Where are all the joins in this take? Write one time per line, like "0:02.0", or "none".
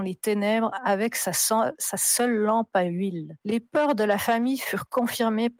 0:03.4